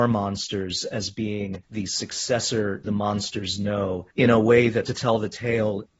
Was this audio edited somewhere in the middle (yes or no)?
yes